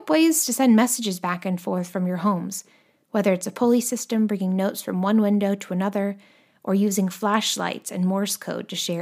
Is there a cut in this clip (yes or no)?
no